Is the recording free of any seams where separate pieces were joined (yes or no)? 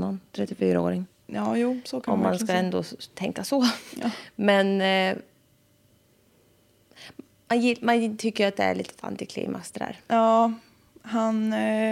yes